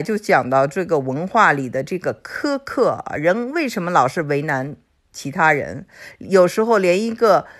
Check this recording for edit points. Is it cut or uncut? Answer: uncut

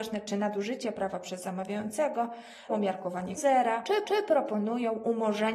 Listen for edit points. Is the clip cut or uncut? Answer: cut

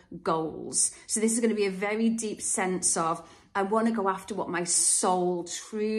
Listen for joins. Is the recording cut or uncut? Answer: uncut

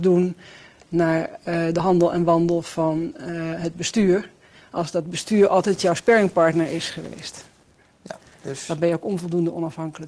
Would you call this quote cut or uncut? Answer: uncut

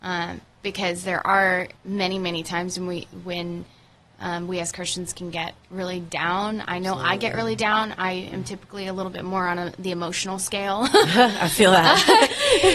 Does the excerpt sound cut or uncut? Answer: cut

